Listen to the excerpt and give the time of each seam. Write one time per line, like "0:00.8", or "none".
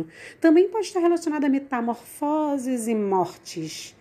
none